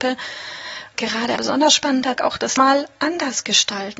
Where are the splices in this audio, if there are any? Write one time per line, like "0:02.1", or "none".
0:00.9
0:01.4
0:02.2
0:02.6